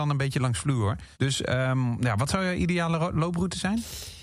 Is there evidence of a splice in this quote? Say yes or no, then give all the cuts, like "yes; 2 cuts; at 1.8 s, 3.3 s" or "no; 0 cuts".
yes; 1 cut; at 1.1 s